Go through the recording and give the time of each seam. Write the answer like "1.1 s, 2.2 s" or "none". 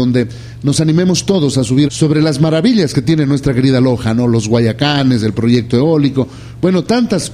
1.8 s